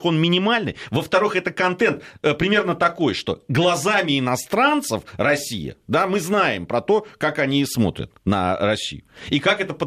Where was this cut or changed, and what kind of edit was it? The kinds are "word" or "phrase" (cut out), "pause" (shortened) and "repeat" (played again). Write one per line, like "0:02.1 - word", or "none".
0:08.2 - pause